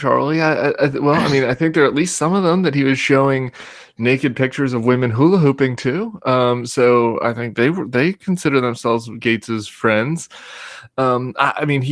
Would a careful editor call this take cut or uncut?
uncut